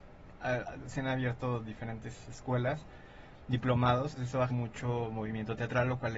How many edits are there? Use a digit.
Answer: 2